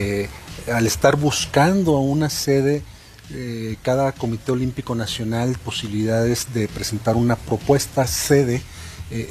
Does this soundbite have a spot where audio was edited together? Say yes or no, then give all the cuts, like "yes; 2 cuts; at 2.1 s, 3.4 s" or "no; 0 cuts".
yes; 1 cut; at 5.6 s